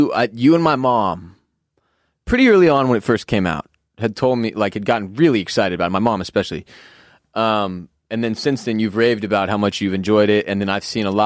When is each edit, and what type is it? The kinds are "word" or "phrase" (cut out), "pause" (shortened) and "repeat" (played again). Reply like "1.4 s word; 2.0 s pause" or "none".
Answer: none